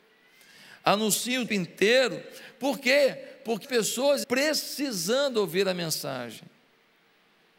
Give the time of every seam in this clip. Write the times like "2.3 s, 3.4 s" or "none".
1.5 s, 3.6 s, 4.2 s